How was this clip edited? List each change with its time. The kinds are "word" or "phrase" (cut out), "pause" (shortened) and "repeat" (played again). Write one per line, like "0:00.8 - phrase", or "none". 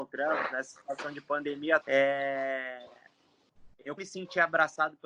0:01.8 - word
0:04.0 - word